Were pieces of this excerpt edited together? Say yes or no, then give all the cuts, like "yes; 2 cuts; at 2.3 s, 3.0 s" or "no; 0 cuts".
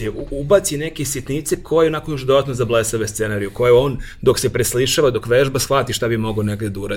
no; 0 cuts